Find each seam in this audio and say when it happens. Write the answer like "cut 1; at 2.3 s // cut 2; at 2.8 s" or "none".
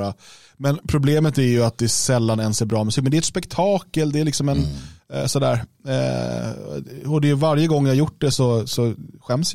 none